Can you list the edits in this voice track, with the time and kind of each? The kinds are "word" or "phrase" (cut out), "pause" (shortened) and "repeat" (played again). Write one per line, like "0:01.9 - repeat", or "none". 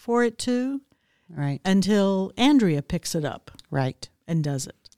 none